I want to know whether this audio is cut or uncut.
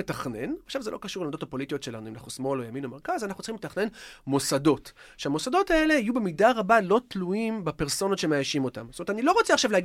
uncut